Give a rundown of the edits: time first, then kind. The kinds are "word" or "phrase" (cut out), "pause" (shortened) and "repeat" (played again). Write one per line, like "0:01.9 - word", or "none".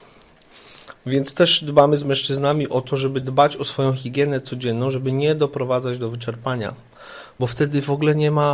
none